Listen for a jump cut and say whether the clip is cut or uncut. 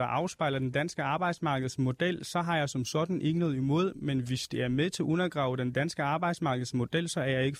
uncut